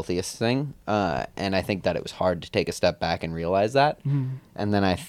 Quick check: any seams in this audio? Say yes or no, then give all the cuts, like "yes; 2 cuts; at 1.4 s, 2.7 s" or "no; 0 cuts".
no; 0 cuts